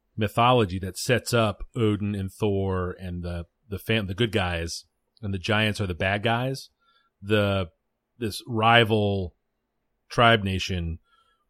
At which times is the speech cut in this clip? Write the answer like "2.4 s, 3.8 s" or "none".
none